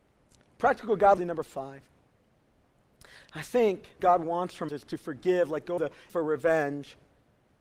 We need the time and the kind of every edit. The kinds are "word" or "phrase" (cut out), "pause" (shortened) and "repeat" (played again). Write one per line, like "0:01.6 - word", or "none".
0:01.2 - word
0:04.0 - word
0:04.7 - word
0:05.8 - word
0:06.1 - word